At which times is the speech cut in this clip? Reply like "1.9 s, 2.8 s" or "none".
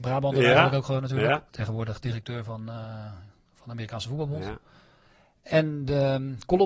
1.5 s